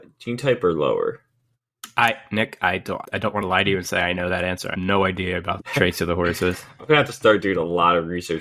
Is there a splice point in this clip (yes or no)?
yes